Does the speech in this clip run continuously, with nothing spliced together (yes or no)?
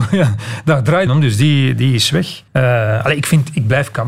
no